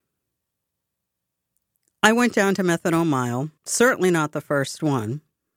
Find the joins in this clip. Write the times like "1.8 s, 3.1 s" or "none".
3.6 s